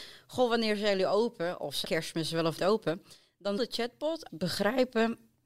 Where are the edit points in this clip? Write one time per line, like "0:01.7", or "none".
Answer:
0:01.8
0:02.6
0:03.6
0:04.3